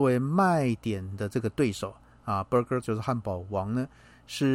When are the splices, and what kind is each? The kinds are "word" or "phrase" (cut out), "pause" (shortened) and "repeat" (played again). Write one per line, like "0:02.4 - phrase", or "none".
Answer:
0:02.8 - word